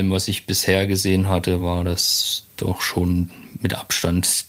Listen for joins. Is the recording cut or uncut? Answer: uncut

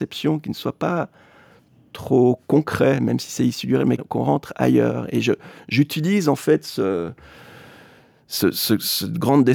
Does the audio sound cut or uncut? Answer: cut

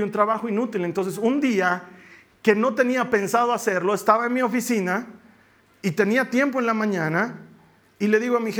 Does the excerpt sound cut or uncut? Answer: uncut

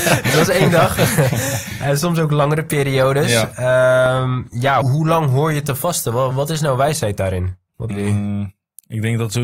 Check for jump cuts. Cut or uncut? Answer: cut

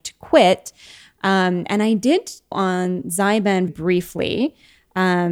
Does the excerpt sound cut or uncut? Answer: cut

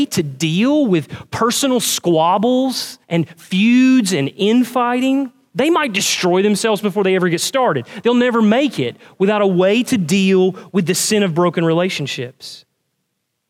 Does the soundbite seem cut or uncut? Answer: cut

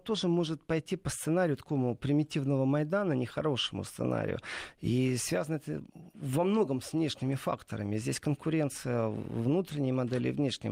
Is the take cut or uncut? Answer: uncut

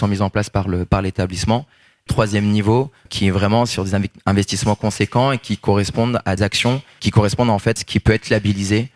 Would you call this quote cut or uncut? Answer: cut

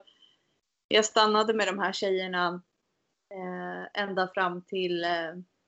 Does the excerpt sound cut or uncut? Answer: uncut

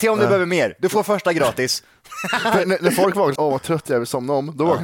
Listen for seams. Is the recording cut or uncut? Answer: cut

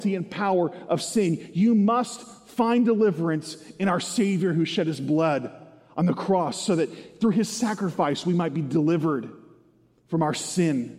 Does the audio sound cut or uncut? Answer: uncut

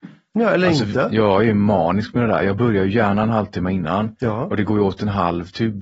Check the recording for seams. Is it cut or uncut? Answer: uncut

